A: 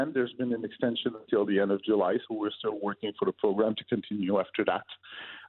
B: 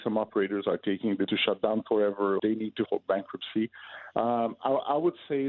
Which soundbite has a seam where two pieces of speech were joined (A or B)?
B